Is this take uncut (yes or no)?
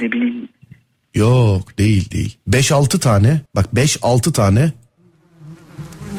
no